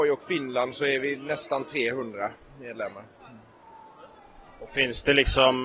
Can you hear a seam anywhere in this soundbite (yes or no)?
no